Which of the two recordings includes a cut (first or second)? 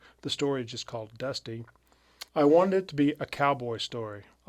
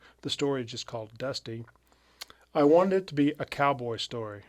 first